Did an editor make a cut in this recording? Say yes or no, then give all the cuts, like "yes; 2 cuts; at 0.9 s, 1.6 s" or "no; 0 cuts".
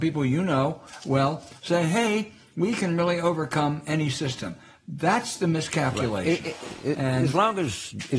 no; 0 cuts